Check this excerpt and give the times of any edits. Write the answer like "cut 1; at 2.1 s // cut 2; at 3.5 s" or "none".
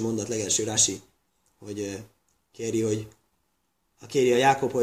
none

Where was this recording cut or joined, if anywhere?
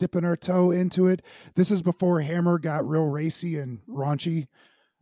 none

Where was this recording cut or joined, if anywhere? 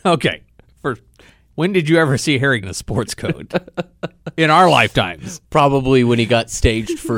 cut 1; at 2.6 s

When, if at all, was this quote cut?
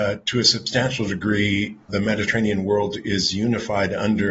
cut 1; at 1.9 s

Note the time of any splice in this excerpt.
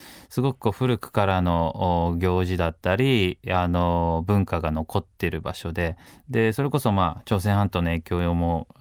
cut 1; at 6.1 s

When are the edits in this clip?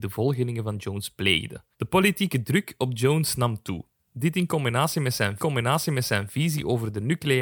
cut 1; at 1.7 s // cut 2; at 5.4 s

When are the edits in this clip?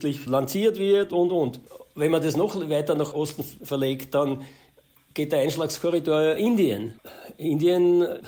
cut 1; at 1.1 s // cut 2; at 6.4 s

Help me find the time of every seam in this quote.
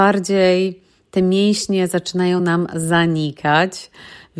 none

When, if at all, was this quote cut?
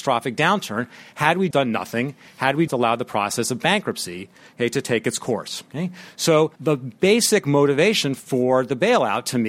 cut 1; at 1.5 s // cut 2; at 2.7 s // cut 3; at 6.6 s

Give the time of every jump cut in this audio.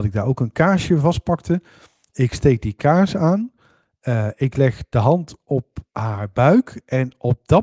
none

